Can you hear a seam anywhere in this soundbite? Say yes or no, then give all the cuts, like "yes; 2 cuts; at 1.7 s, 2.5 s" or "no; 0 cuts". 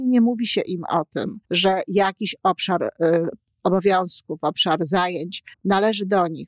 yes; 2 cuts; at 1.4 s, 5.5 s